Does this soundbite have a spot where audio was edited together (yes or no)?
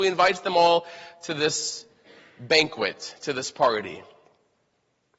no